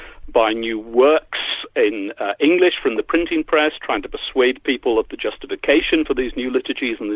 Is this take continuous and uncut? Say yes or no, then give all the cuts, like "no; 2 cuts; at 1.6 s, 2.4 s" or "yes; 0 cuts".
yes; 0 cuts